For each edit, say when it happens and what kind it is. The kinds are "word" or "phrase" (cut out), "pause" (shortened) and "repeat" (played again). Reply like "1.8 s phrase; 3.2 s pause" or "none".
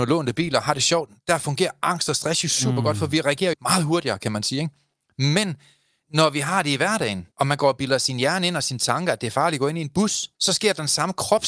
3.5 s word; 7.3 s pause; 10.3 s pause